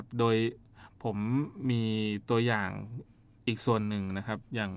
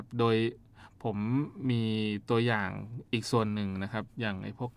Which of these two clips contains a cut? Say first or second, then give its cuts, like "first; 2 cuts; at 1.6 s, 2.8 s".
second; 1 cut; at 3.1 s